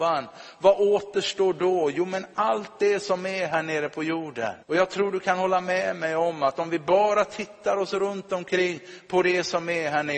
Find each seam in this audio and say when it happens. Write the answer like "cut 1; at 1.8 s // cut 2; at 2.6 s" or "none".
cut 1; at 4.6 s